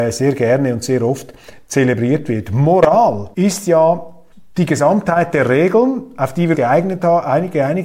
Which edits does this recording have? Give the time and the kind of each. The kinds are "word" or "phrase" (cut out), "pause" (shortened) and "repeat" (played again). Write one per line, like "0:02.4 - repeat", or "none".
0:03.3 - pause
0:04.3 - pause
0:06.5 - word